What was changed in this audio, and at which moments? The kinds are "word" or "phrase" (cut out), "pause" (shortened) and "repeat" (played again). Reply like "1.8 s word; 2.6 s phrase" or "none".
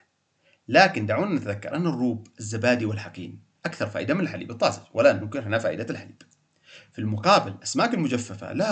none